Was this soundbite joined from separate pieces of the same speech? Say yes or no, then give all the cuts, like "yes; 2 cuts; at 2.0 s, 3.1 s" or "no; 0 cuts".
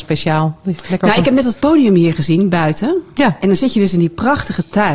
no; 0 cuts